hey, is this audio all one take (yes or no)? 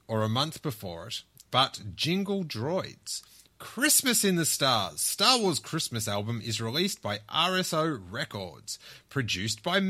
yes